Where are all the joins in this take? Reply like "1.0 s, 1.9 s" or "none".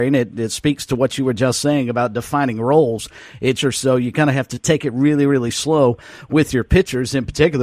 3.6 s